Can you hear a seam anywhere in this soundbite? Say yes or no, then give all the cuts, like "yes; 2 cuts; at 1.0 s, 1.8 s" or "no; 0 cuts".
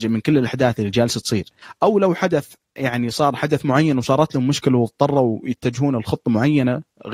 no; 0 cuts